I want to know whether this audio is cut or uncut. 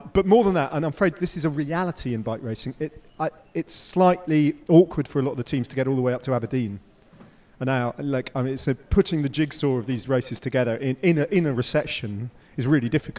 uncut